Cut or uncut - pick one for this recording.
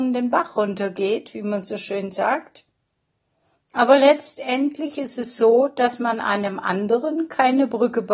uncut